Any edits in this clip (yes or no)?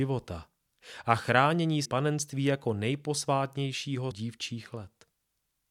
yes